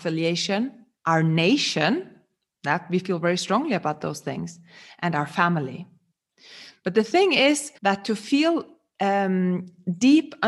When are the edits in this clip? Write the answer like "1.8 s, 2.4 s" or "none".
1.0 s, 7.8 s